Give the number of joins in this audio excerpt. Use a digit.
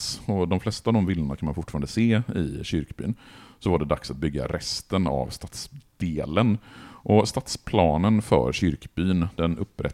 0